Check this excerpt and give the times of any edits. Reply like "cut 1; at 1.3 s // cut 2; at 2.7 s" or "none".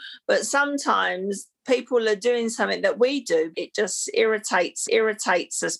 cut 1; at 3.5 s // cut 2; at 4.9 s